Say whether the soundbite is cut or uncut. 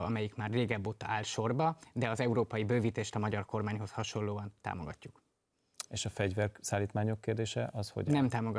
uncut